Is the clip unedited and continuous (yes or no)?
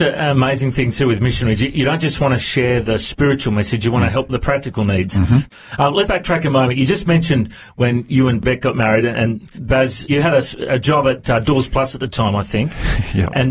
no